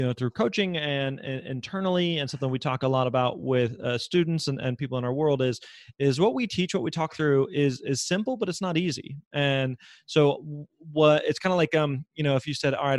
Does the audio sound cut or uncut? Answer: uncut